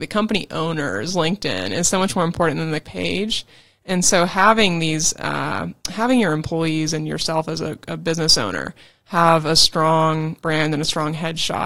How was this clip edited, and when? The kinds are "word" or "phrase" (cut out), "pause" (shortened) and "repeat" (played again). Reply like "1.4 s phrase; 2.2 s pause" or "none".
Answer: 2.8 s word; 5.8 s pause; 10.4 s pause